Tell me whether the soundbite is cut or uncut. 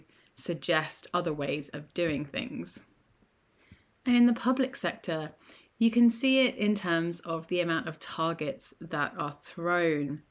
uncut